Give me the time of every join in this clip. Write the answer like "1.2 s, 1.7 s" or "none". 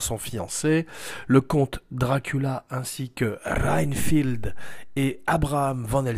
none